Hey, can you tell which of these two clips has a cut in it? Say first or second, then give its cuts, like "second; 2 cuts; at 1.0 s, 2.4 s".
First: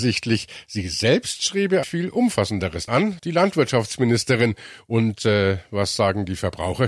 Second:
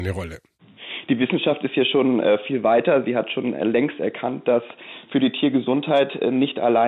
first; 3 cuts; at 1.8 s, 2.9 s, 3.2 s